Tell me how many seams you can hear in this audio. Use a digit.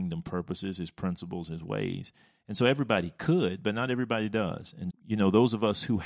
1